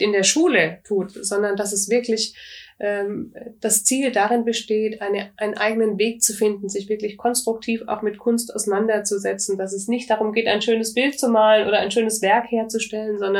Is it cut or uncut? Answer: uncut